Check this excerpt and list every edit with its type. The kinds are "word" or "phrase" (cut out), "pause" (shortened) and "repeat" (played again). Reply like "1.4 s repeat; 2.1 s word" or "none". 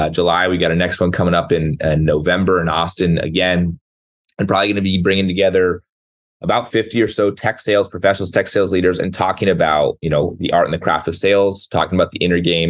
none